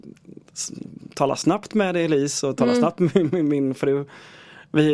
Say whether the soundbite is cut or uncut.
uncut